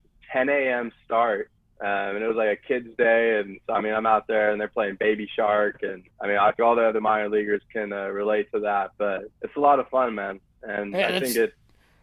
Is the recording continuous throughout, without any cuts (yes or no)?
no